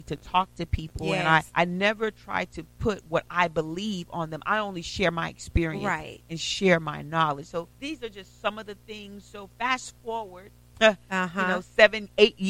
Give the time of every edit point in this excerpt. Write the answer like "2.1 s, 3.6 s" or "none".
1.5 s, 7.7 s